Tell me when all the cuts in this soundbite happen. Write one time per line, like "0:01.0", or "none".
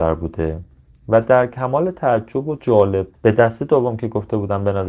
0:03.1